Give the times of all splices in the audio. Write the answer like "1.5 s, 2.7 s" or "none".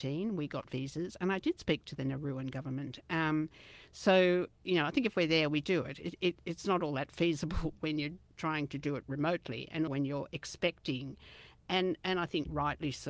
9.9 s